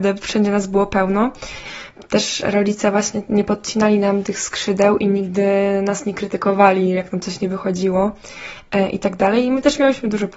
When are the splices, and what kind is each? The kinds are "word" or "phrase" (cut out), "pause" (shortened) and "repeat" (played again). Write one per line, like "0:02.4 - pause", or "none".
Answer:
none